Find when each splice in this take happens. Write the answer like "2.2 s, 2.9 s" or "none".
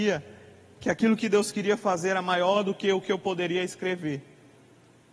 none